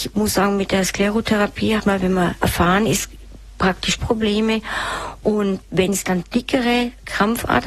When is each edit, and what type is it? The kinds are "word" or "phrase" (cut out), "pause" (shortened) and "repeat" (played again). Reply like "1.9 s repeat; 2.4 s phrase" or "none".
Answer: 1.8 s word; 4.0 s word; 6.2 s word